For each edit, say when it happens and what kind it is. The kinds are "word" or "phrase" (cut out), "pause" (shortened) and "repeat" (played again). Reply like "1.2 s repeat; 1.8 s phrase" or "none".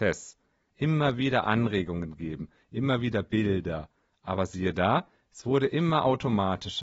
none